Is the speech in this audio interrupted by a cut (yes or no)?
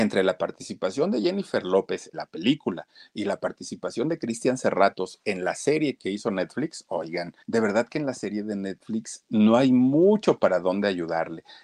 yes